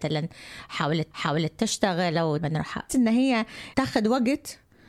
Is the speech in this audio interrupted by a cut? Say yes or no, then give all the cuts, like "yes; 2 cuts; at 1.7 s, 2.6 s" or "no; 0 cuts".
yes; 4 cuts; at 1.1 s, 2.4 s, 2.9 s, 3.7 s